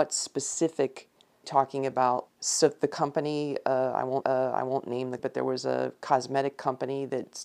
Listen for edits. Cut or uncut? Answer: cut